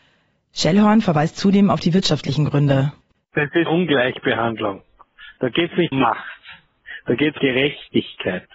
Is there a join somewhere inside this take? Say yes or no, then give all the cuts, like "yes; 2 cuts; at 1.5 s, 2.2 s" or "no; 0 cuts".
yes; 3 cuts; at 3.7 s, 5.9 s, 7.4 s